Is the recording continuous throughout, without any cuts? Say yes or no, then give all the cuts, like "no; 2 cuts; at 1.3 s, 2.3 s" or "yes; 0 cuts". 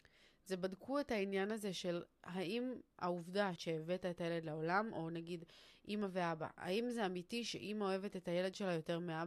no; 1 cut; at 3.6 s